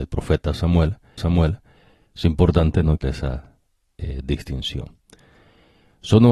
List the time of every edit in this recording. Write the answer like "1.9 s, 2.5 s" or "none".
1.2 s, 3.0 s